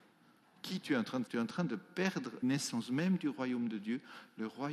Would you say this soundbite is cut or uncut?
cut